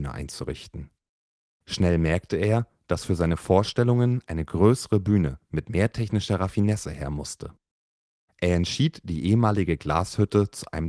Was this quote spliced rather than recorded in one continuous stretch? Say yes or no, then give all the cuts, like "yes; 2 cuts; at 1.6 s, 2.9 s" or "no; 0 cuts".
no; 0 cuts